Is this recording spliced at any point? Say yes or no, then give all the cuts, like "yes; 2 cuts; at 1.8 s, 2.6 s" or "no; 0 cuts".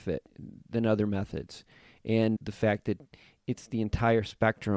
yes; 1 cut; at 2.4 s